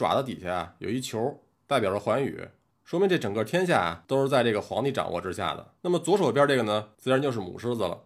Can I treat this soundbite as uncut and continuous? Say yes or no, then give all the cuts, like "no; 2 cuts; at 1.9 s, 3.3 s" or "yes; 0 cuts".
no; 3 cuts; at 1.5 s, 5.8 s, 6.9 s